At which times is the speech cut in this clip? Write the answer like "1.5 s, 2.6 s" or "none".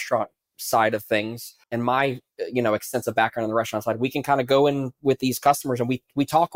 1.6 s